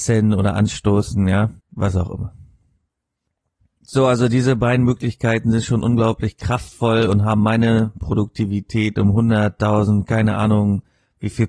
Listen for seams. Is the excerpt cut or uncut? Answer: cut